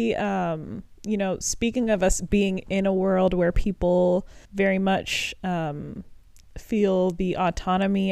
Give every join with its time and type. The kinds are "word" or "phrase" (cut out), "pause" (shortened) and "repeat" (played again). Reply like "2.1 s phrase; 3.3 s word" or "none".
1.0 s pause; 4.4 s pause